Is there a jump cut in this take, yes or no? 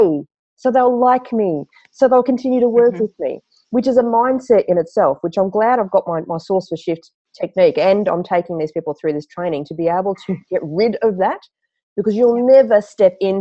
no